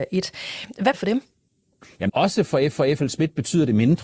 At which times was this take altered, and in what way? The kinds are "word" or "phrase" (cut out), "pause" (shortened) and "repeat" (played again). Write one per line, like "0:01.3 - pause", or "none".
0:00.9 - word
0:02.1 - word
0:02.7 - repeat